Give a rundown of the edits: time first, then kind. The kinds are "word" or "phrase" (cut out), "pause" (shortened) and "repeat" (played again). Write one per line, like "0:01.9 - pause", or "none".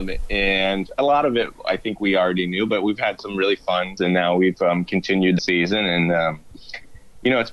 0:04.0 - word
0:05.4 - phrase